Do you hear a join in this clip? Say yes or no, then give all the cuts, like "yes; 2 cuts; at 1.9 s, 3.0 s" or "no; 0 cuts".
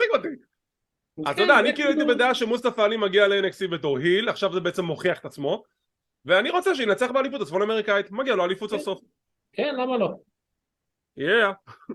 no; 0 cuts